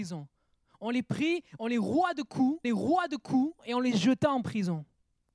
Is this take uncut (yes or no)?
no